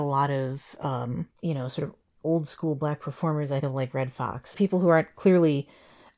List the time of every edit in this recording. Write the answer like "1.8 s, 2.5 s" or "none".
1.3 s, 3.6 s, 4.5 s